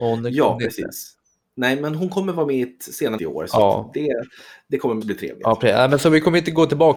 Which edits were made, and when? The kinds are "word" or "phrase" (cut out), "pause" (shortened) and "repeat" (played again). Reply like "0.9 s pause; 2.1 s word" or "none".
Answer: 3.2 s word; 5.0 s word

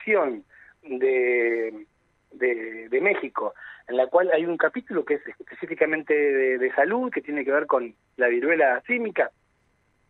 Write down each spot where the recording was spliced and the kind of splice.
none

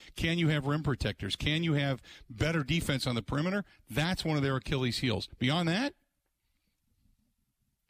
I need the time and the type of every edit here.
none

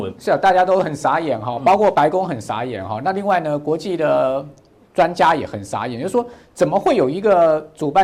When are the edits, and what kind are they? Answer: none

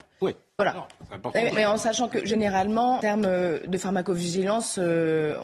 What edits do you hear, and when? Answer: 1.5 s word; 2.1 s word; 3.0 s word

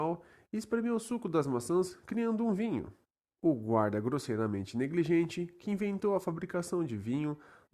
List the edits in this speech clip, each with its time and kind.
3.1 s pause

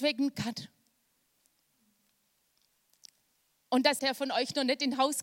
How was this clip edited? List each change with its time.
4.0 s word

